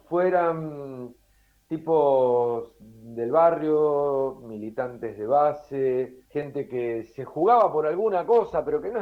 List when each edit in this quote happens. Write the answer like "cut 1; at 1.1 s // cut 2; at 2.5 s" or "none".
cut 1; at 6.3 s